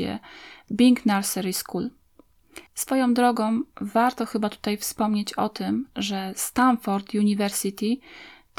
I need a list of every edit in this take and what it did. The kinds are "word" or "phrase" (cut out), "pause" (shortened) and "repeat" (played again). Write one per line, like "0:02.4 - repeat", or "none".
0:02.7 - pause

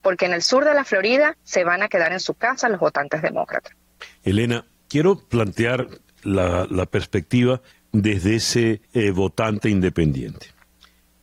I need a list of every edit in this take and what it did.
0:01.4 - pause
0:04.8 - pause
0:07.7 - pause
0:08.9 - pause

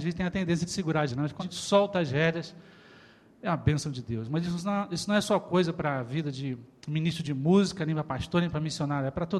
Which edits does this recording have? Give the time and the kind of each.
0:01.1 - word
0:01.4 - word

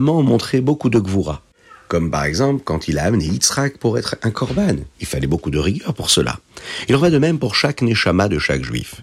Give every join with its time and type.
none

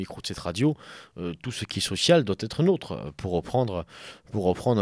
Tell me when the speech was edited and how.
none

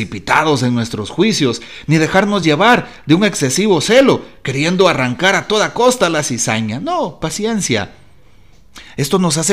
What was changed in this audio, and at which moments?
none

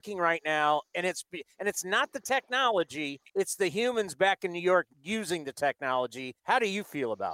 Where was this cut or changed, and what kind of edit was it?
0:03.3 - pause
0:04.9 - pause
0:06.4 - pause

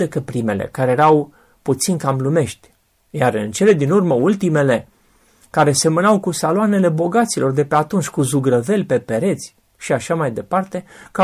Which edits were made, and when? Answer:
none

